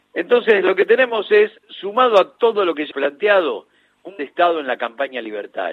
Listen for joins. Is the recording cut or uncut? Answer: cut